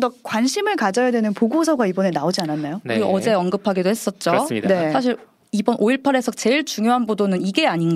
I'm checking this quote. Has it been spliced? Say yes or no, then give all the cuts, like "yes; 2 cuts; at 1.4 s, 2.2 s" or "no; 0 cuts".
no; 0 cuts